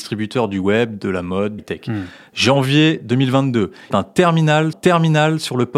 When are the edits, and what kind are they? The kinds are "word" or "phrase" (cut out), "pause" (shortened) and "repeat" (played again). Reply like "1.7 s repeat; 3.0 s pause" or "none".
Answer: 1.6 s word; 3.9 s phrase; 4.7 s repeat